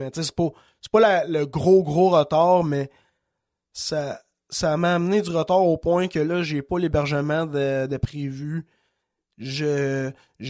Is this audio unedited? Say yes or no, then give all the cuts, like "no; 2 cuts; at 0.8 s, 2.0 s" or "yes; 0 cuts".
yes; 0 cuts